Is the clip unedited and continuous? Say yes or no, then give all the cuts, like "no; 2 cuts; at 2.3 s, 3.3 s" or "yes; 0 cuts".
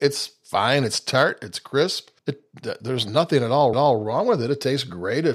no; 2 cuts; at 2.2 s, 3.7 s